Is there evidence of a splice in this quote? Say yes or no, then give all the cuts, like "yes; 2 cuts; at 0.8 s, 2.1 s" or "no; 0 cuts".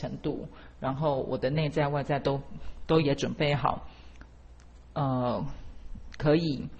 no; 0 cuts